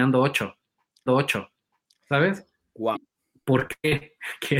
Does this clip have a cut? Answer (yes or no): yes